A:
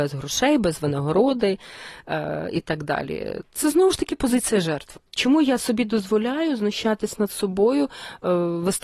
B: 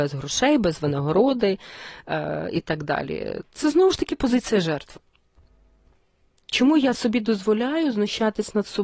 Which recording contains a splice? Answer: A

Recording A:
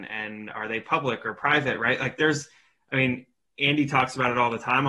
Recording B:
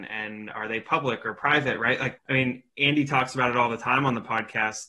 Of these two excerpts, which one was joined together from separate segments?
B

